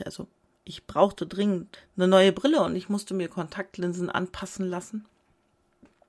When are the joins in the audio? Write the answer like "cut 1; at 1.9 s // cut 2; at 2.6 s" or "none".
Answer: cut 1; at 1.7 s